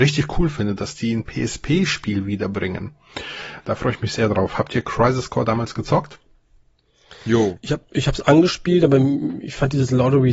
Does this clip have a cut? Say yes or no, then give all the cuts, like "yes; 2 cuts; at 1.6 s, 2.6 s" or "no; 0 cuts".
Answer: no; 0 cuts